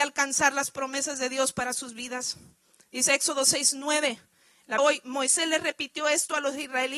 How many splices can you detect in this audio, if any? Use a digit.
1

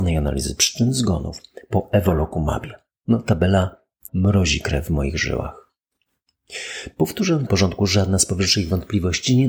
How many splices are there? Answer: 2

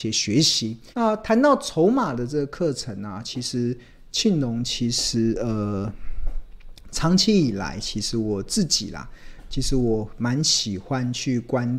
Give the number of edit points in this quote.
1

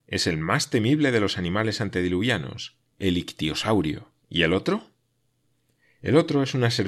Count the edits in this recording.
2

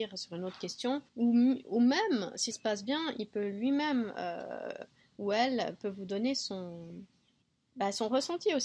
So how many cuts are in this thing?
4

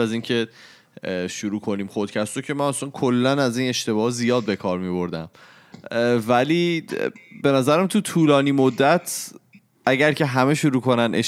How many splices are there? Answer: 0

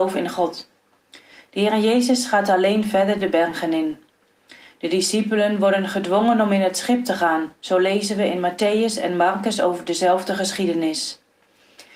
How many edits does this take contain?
0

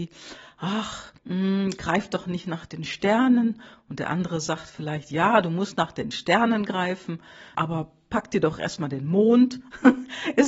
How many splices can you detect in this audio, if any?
2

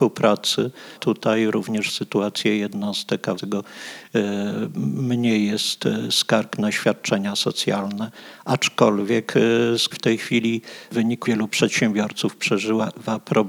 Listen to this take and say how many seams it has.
4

